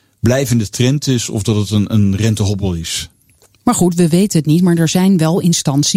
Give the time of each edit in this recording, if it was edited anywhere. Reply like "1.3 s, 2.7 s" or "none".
none